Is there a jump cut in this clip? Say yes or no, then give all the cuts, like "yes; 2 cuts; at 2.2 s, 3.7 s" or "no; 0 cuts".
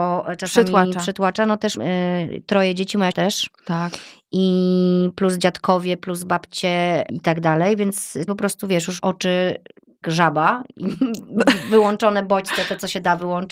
yes; 6 cuts; at 1.8 s, 3.1 s, 7.1 s, 8.3 s, 9.0 s, 10.0 s